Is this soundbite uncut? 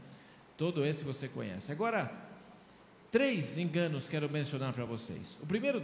yes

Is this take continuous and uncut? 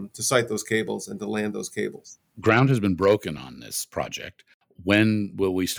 yes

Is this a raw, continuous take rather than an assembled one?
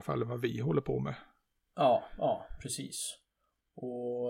yes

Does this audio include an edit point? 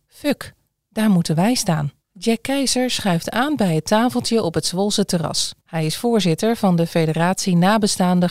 yes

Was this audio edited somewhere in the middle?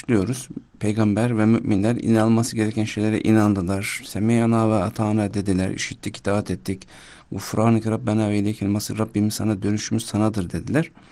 no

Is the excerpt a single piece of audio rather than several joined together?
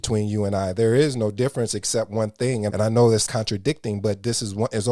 no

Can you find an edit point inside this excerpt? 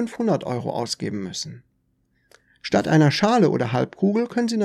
no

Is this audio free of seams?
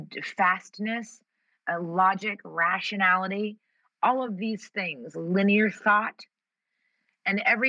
yes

